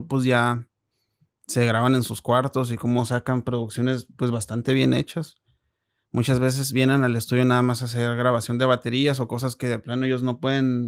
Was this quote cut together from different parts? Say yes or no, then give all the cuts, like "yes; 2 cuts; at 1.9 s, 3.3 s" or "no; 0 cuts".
no; 0 cuts